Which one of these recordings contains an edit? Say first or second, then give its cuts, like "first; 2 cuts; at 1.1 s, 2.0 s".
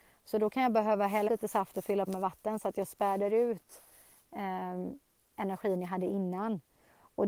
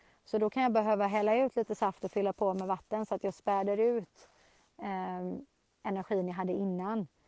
first; 2 cuts; at 1.3 s, 2.1 s